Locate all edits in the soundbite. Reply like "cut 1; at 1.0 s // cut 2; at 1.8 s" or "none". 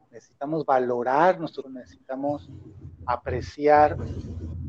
cut 1; at 1.6 s